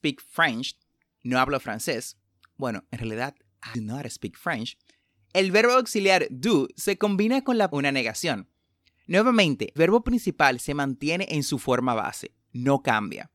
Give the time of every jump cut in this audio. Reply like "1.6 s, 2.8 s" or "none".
7.7 s, 9.8 s